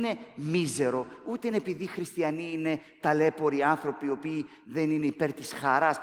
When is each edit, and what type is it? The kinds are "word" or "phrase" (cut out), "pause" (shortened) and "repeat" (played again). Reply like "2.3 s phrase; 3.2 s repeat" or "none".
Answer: none